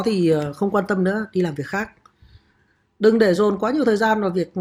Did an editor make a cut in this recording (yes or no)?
no